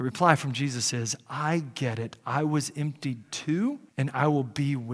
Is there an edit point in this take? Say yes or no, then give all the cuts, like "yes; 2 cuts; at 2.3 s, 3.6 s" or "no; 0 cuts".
yes; 1 cut; at 3.9 s